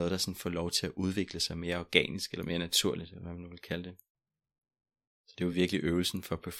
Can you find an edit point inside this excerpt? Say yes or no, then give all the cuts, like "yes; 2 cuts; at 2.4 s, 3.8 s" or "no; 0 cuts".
no; 0 cuts